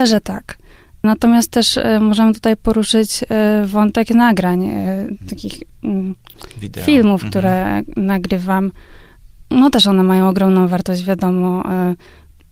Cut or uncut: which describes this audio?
cut